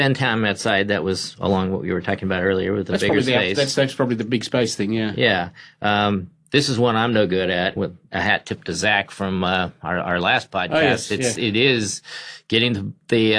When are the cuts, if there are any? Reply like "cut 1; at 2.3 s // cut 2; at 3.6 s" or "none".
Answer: cut 1; at 7.8 s